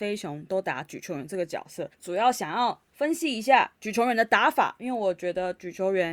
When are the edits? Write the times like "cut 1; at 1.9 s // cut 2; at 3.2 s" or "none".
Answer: cut 1; at 1.9 s